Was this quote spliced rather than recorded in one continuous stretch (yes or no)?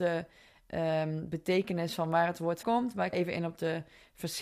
yes